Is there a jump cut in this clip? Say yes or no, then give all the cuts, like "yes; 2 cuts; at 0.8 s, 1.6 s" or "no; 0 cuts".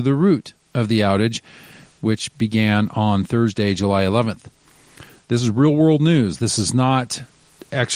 no; 0 cuts